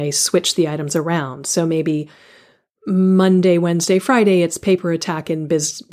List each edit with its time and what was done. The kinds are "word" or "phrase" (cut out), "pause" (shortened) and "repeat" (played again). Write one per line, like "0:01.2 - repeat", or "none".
none